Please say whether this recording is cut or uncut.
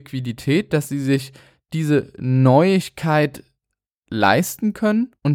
uncut